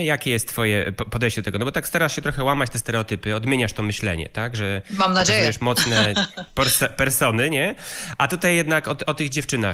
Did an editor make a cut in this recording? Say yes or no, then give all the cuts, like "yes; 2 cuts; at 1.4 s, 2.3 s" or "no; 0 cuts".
no; 0 cuts